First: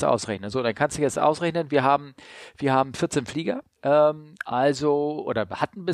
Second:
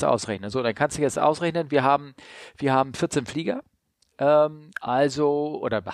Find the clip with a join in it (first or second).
first